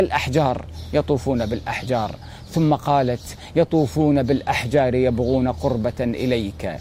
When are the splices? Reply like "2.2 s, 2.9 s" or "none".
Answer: none